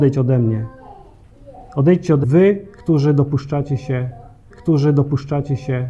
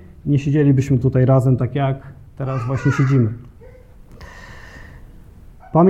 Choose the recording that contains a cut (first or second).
first